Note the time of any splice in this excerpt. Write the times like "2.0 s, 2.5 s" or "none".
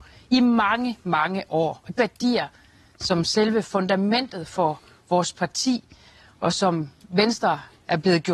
2.0 s